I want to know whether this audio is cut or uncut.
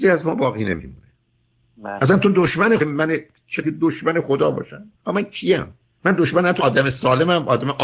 cut